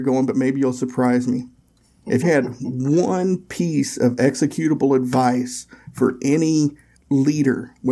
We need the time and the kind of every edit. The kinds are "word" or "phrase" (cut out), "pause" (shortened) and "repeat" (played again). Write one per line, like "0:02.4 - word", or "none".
0:02.2 - word
0:07.0 - word